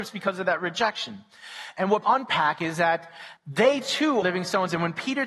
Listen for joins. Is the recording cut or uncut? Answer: cut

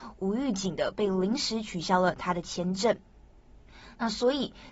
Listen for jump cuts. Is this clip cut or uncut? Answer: uncut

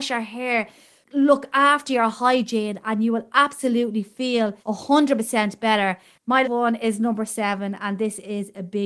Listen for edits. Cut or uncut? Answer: cut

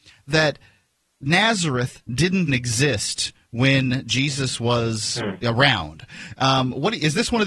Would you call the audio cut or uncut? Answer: cut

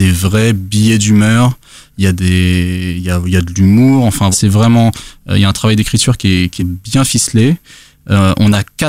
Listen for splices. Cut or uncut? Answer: cut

